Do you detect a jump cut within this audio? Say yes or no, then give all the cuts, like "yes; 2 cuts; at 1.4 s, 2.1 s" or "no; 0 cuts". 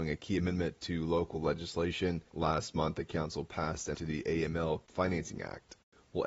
yes; 2 cuts; at 3.9 s, 4.9 s